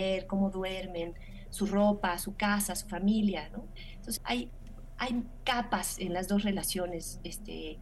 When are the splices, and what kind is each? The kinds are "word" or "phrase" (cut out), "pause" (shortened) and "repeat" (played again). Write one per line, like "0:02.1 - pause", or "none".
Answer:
0:04.2 - word

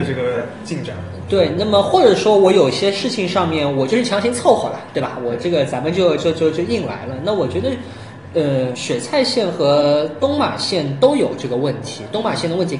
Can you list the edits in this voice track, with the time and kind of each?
0:08.7 - word

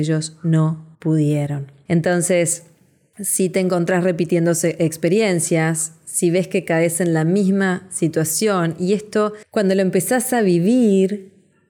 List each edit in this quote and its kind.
0:00.9 - pause

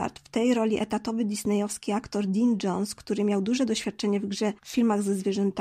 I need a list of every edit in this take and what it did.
0:04.6 - pause

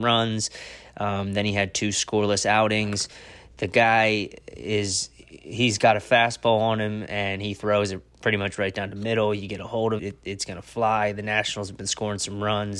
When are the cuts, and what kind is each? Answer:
0:10.0 - word

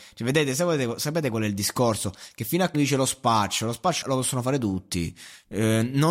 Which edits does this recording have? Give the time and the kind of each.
0:02.7 - word
0:04.0 - word

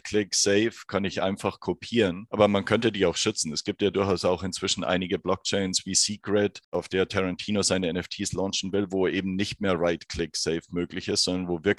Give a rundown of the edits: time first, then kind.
none

